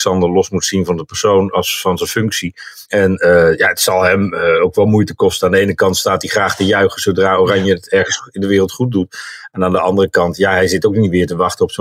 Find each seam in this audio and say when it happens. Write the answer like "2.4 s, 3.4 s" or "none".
2.9 s